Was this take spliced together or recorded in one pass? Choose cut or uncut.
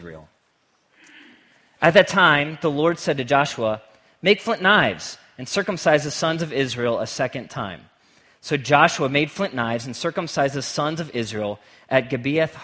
uncut